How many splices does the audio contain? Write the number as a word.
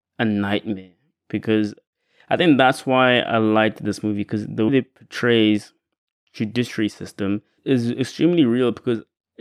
two